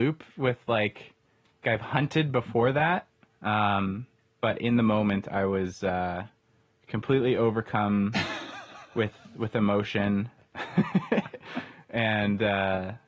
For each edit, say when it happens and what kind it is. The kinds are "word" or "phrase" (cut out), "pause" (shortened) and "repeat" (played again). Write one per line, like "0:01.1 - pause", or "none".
0:01.6 - word